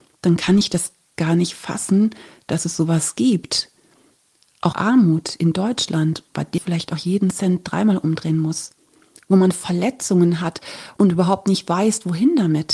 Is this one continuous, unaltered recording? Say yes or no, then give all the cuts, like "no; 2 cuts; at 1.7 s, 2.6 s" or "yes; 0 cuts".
no; 3 cuts; at 4.7 s, 6.6 s, 11.0 s